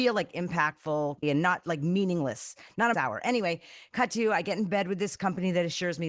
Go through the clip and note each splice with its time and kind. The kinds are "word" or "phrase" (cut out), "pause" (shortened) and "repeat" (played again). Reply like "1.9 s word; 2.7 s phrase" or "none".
1.2 s word; 2.9 s word